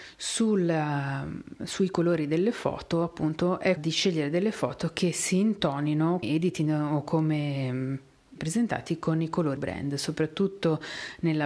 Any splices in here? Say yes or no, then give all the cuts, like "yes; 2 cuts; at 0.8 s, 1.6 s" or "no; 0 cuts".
yes; 4 cuts; at 3.8 s, 6.2 s, 8.4 s, 9.6 s